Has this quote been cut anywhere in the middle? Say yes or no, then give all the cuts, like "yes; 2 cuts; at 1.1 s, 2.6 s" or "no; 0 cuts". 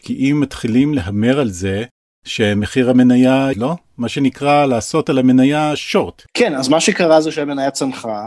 yes; 1 cut; at 3.5 s